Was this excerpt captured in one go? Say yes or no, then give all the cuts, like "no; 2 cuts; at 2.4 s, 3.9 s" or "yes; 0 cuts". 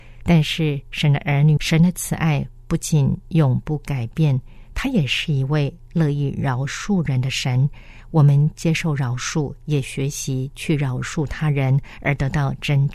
no; 1 cut; at 1.6 s